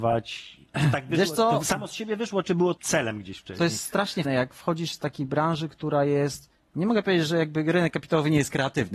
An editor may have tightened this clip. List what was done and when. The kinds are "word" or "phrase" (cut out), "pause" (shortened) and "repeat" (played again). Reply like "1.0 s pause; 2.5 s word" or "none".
2.8 s word; 4.2 s word